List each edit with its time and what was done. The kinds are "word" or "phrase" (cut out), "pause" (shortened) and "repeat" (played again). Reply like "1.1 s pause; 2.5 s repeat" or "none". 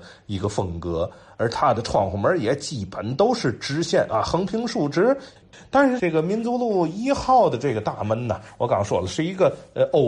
none